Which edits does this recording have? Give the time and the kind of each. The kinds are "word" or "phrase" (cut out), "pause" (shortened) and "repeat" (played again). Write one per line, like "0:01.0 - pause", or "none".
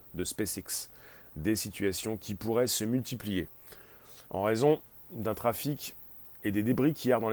0:04.2 - pause